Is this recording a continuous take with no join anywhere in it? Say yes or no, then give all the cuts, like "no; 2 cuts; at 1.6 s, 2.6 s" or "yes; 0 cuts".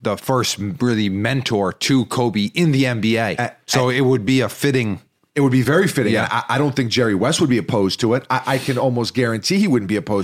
yes; 0 cuts